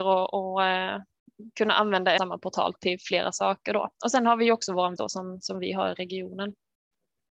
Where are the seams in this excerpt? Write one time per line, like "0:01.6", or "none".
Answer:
0:02.2
0:03.9
0:05.0